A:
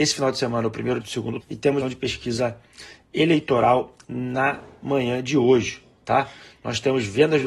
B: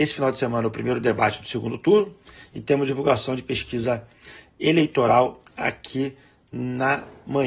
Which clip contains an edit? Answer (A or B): A